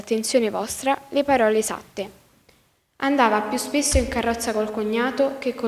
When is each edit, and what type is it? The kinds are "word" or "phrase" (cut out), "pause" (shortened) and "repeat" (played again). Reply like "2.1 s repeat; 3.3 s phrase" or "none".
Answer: none